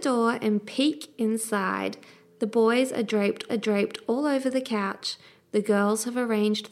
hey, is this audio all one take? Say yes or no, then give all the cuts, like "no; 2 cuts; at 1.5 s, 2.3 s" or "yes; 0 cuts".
no; 1 cut; at 3.5 s